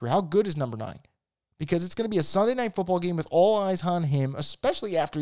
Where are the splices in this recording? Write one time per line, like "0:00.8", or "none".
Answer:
none